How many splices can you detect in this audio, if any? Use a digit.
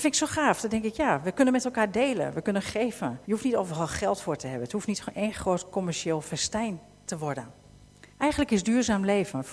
2